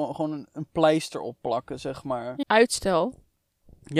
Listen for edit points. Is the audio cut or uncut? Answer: cut